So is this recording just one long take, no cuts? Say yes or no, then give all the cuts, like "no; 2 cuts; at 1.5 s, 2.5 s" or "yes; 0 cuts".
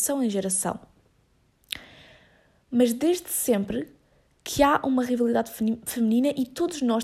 yes; 0 cuts